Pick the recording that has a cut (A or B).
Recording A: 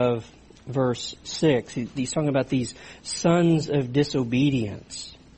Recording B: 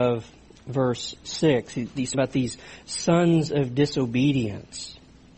B